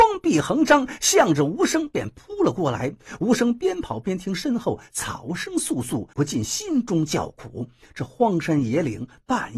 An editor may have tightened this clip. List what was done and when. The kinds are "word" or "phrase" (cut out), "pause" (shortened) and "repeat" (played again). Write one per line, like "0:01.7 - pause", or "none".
0:06.1 - pause